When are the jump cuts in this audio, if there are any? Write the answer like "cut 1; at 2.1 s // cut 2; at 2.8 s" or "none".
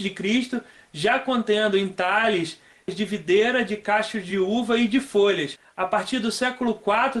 none

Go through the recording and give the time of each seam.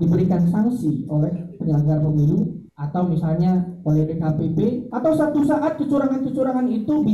cut 1; at 2.7 s // cut 2; at 4.9 s

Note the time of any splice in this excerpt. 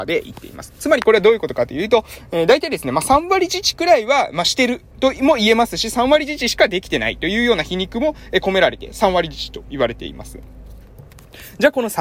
cut 1; at 4.9 s

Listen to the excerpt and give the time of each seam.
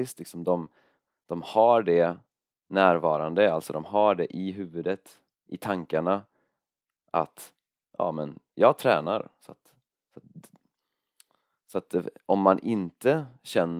none

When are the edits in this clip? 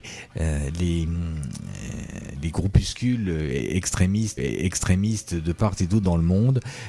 cut 1; at 4.4 s

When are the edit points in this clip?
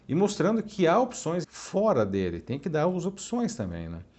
cut 1; at 1.4 s

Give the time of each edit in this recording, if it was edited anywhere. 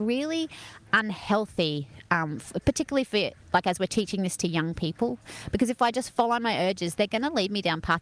cut 1; at 3.4 s

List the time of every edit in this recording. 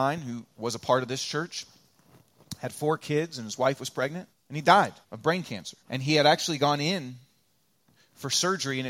cut 1; at 4.3 s // cut 2; at 5.0 s // cut 3; at 5.8 s

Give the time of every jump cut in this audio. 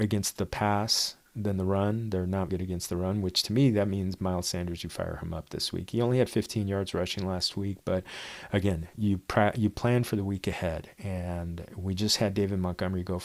cut 1; at 2.5 s

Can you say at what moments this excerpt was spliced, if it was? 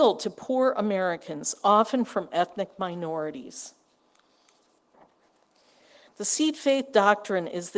none

